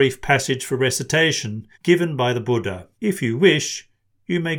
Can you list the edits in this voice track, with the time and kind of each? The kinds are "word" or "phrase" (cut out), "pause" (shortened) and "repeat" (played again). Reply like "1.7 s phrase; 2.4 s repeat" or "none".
1.7 s pause; 2.9 s pause